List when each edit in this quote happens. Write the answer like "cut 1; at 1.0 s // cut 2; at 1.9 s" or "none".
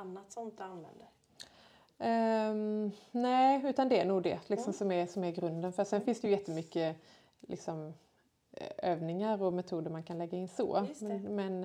none